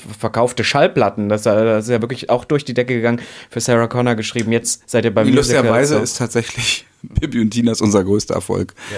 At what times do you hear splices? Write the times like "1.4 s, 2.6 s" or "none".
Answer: none